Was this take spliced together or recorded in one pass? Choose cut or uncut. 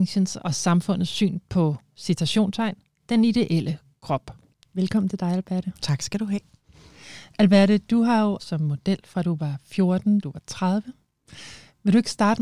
cut